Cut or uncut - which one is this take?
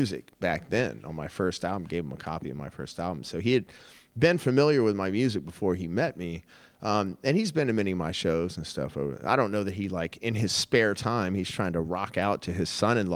uncut